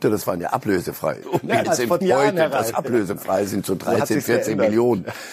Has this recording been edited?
yes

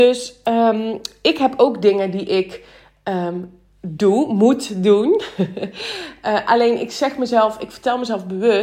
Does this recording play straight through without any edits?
yes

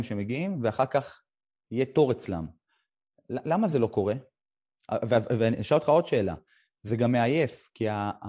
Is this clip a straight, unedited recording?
yes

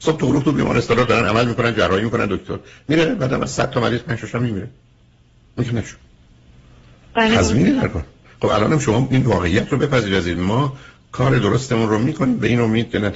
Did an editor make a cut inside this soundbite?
no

